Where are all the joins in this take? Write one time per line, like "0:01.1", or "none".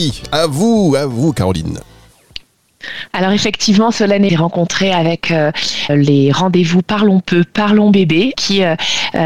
0:04.3
0:05.9
0:08.3